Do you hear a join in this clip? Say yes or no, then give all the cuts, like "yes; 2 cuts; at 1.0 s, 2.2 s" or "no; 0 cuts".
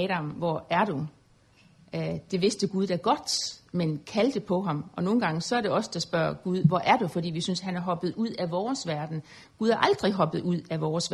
no; 0 cuts